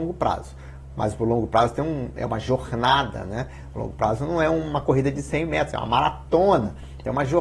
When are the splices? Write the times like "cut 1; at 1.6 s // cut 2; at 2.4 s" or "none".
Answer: none